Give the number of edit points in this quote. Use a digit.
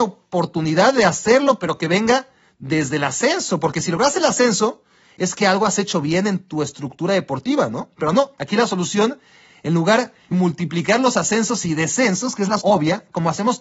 2